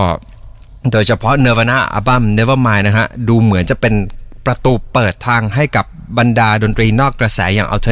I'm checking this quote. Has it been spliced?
no; 0 cuts

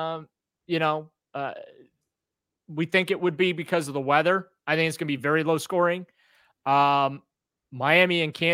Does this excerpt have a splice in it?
no; 0 cuts

